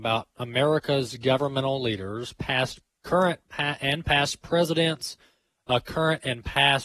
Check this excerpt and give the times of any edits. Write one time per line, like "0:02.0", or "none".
none